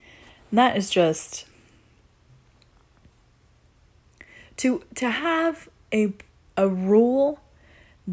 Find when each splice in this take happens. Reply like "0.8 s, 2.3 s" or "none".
none